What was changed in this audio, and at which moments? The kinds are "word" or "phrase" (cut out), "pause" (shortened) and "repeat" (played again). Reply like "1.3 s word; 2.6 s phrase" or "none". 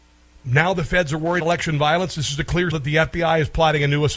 1.4 s word; 2.7 s word